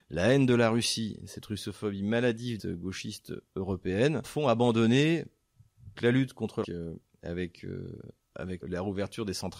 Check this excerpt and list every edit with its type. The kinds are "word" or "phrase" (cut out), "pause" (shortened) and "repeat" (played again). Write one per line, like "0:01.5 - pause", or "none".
0:02.6 - phrase
0:04.2 - word
0:06.0 - word
0:06.6 - phrase
0:08.6 - word